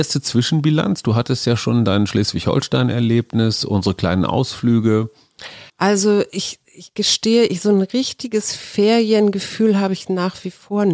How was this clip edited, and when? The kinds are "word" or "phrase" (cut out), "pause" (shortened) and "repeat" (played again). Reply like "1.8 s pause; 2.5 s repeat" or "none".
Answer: 5.7 s pause

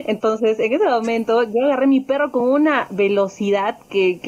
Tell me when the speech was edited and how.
none

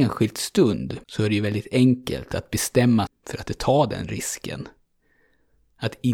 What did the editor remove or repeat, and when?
1.0 s pause; 3.1 s word; 3.5 s word

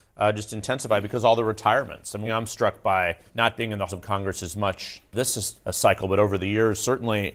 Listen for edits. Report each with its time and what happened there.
2.2 s phrase; 3.3 s word; 3.9 s word; 5.1 s word; 5.6 s pause

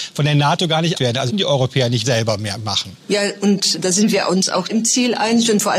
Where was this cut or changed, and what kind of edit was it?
0.9 s word; 1.3 s word; 2.0 s word; 3.0 s pause; 3.7 s word; 4.7 s word

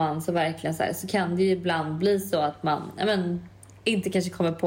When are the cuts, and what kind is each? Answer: none

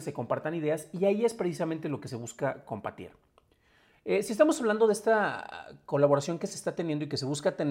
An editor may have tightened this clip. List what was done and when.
none

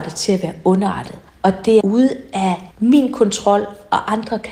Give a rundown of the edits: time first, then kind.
1.3 s pause; 1.8 s phrase; 2.7 s pause

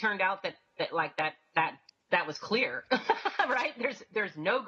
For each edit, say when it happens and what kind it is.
1.9 s pause

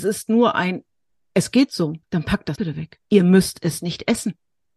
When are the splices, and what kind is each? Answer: 2.0 s pause; 2.6 s word; 3.0 s pause

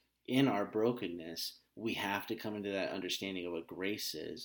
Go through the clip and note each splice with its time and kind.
1.7 s pause

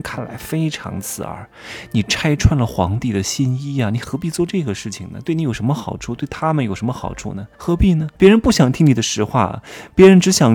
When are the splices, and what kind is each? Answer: 7.5 s pause; 8.1 s pause

